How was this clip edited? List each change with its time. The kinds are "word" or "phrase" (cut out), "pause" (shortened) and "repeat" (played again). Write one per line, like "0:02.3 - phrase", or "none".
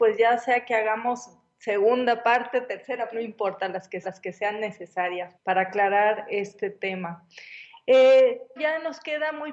0:03.1 - word
0:04.0 - repeat
0:05.3 - word
0:08.6 - word